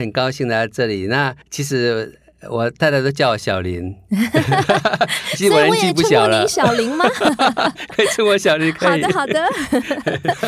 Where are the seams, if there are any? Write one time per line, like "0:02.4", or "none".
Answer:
0:01.4